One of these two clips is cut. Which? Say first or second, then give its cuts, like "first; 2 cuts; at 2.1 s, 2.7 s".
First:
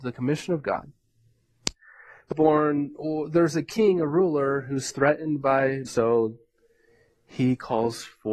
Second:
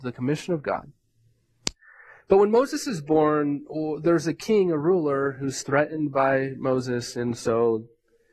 first; 2 cuts; at 2.3 s, 5.9 s